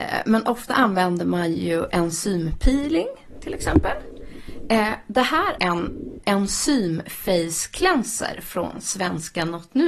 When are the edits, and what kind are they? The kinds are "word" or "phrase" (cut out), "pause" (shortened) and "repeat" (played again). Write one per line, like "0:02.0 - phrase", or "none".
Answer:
0:05.6 - word
0:06.2 - word